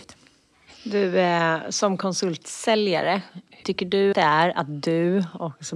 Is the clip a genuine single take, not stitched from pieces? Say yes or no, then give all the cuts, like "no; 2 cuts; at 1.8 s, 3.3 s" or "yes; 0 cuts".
no; 2 cuts; at 3.6 s, 4.1 s